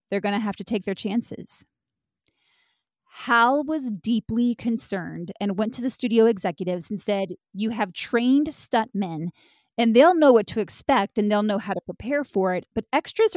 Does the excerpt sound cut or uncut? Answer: uncut